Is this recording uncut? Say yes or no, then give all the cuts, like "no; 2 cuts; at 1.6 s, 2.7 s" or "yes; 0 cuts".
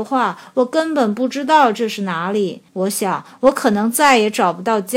no; 1 cut; at 2.7 s